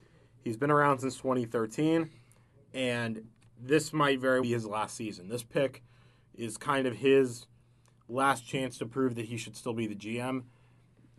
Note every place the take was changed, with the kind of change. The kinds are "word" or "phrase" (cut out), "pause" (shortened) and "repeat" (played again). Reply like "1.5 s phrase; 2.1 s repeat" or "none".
4.4 s word